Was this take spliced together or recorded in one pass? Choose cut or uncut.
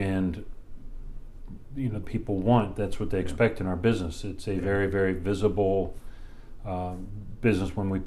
cut